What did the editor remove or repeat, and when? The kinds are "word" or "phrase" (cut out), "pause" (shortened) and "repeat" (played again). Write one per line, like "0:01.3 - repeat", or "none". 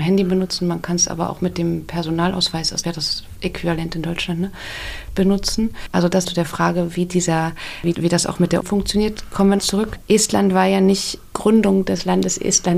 0:02.8 - word
0:06.2 - word
0:07.9 - word
0:08.6 - word
0:09.6 - word
0:11.3 - word